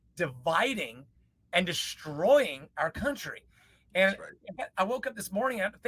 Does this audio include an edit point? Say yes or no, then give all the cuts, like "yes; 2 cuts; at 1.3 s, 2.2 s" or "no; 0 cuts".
no; 0 cuts